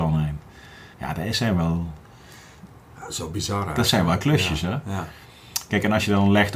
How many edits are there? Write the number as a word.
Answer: one